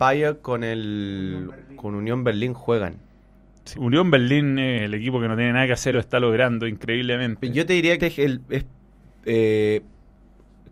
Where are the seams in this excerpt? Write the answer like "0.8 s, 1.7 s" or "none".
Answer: 3.7 s, 5.9 s, 8.0 s